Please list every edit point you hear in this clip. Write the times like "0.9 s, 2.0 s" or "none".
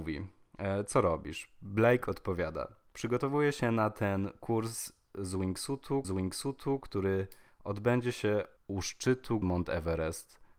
6.0 s, 8.6 s, 9.4 s

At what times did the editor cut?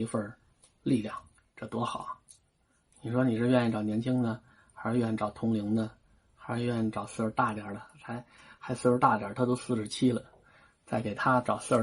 none

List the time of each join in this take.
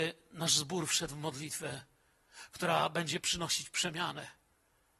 none

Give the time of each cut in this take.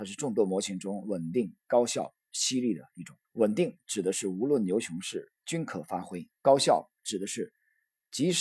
3.2 s, 5.4 s, 6.3 s

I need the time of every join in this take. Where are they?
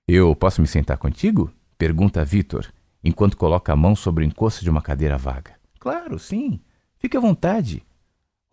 none

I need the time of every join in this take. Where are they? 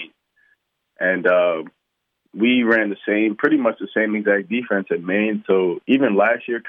none

